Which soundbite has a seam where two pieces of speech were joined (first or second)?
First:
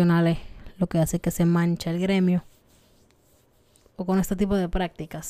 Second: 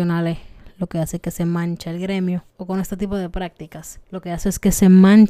second